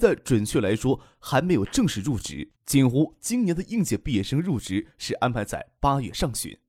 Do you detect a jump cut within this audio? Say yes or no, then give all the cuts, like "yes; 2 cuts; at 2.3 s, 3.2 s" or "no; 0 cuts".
yes; 1 cut; at 2.6 s